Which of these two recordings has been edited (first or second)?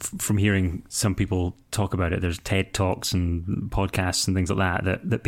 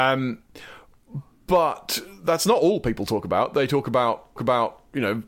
second